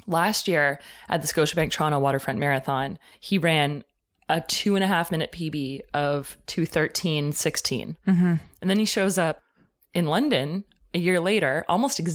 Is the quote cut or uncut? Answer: uncut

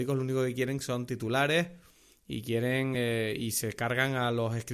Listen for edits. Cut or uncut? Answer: uncut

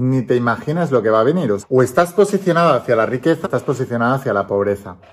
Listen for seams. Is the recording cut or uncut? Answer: cut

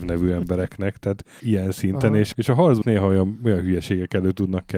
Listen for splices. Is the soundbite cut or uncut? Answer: cut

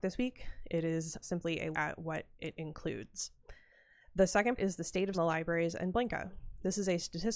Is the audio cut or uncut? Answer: cut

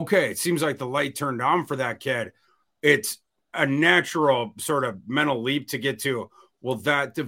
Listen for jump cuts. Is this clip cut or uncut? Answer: uncut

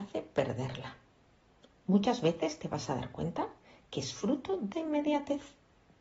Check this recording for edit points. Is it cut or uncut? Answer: cut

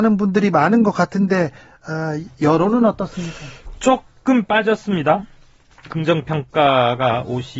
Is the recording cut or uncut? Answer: uncut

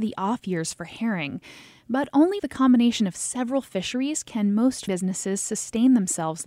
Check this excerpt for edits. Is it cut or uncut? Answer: cut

